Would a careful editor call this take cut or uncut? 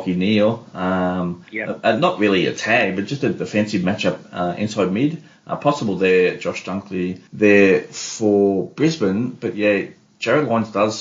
cut